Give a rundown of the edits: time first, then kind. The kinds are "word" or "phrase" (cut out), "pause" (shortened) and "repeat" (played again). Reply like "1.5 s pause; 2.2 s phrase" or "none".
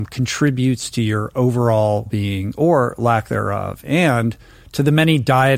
2.1 s word